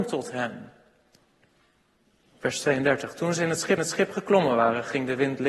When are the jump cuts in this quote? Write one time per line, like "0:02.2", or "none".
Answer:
0:03.8